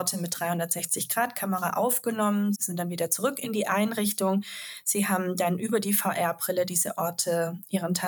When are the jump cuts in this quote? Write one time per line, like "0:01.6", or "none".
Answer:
0:02.5